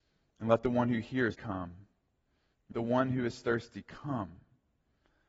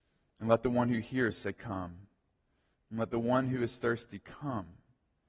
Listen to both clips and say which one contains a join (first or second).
first